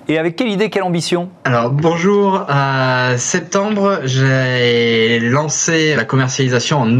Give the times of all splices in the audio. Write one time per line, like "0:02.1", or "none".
0:01.4
0:05.9